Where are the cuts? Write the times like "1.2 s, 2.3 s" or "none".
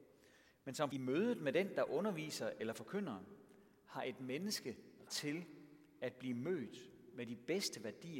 0.9 s, 5.1 s

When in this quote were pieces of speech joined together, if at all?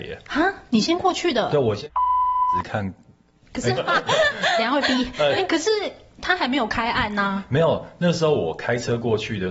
3.8 s

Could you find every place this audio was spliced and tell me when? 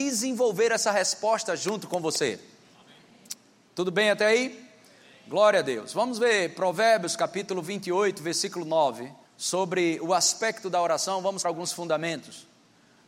9.2 s, 11.4 s

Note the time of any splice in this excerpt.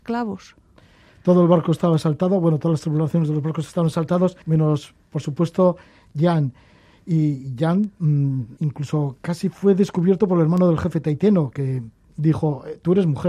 4.4 s, 8.6 s

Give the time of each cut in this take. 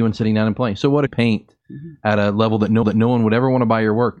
1.1 s, 2.8 s

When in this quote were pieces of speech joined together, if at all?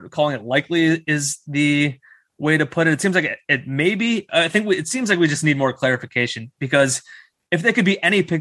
none

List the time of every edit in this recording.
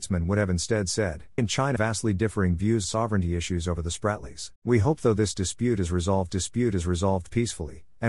1.4 s, 1.8 s, 2.8 s, 4.6 s, 6.3 s

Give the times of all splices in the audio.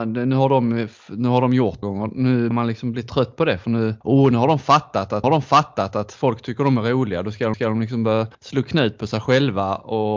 1.8 s, 2.5 s, 4.0 s, 5.2 s, 7.5 s, 8.3 s

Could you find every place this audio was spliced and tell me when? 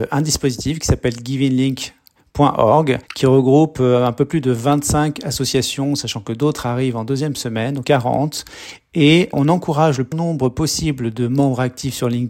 3.0 s, 7.8 s, 9.3 s, 10.1 s

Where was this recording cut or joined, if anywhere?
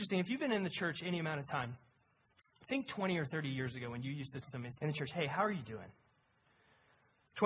4.4 s, 4.8 s

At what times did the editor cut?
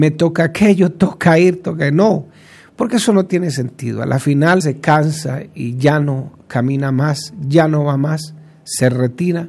4.6 s

